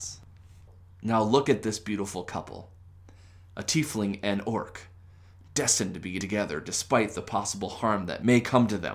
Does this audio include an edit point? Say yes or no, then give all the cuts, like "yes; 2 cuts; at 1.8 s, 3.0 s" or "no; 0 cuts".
no; 0 cuts